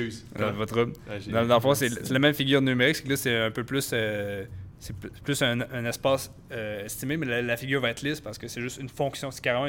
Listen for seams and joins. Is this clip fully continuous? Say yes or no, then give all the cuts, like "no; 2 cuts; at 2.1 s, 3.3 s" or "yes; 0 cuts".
yes; 0 cuts